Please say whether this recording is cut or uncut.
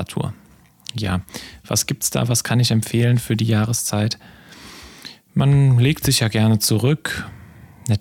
uncut